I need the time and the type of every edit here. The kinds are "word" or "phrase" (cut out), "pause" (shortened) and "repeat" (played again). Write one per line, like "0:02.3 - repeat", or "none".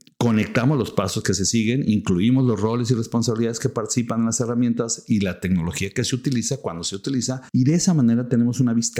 0:07.5 - pause